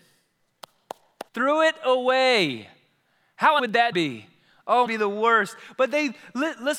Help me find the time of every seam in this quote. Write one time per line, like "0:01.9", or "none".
0:01.3
0:03.6
0:03.9
0:04.9